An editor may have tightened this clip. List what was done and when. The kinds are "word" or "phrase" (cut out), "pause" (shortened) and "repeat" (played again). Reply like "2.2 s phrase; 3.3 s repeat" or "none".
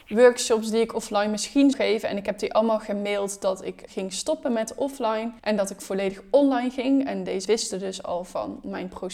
1.7 s word; 3.9 s word; 5.4 s pause; 7.4 s word